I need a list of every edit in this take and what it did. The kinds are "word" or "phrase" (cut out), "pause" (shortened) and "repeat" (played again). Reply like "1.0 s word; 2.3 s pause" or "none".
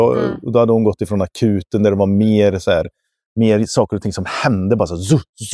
none